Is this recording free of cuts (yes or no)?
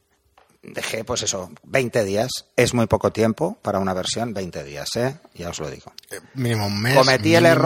yes